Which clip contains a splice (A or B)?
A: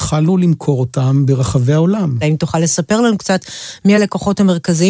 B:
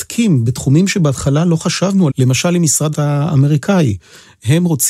B